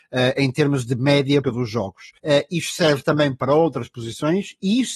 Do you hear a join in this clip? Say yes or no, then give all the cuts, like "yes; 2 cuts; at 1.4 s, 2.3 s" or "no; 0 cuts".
yes; 2 cuts; at 1.4 s, 2.2 s